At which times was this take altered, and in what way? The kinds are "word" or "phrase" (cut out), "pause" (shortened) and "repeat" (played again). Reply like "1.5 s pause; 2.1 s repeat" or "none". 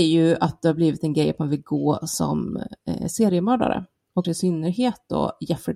2.8 s pause; 4.2 s word

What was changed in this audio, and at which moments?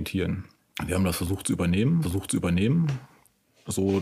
2.0 s repeat

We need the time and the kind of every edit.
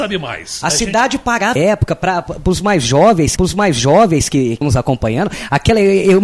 1.6 s phrase; 3.4 s repeat; 4.6 s word

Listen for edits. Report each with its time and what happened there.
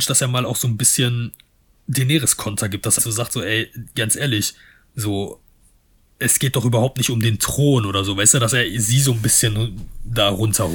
3.0 s word

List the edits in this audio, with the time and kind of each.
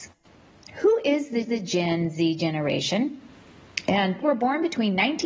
1.4 s repeat; 4.2 s word

